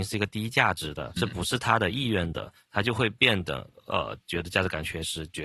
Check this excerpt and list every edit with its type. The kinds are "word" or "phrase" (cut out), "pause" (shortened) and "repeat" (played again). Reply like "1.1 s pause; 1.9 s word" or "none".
1.2 s word